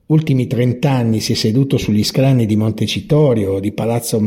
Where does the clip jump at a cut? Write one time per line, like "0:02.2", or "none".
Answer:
none